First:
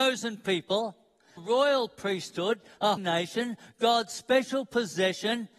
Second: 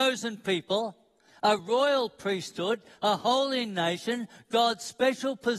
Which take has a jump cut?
first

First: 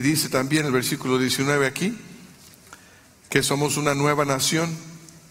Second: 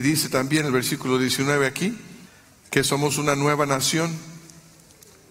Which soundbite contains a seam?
second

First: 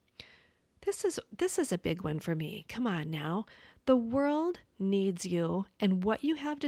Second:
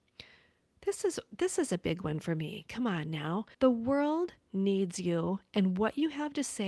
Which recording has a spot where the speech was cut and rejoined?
second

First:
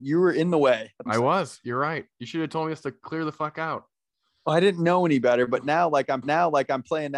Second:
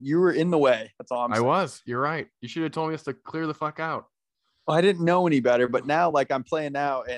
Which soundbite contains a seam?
first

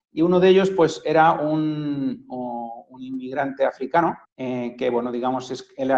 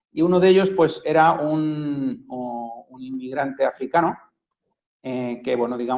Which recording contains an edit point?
first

